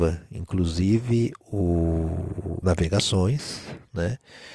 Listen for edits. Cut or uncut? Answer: cut